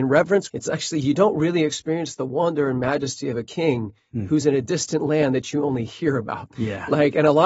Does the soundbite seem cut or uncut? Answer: uncut